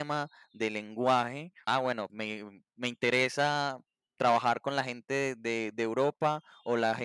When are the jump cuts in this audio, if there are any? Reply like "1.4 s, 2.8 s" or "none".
1.7 s, 2.1 s, 2.7 s